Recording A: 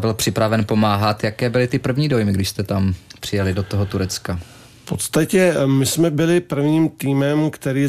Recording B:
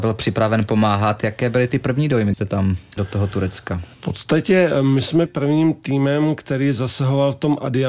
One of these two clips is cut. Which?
B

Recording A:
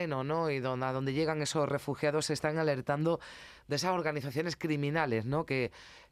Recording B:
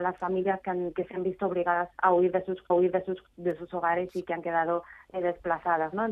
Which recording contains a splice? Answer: B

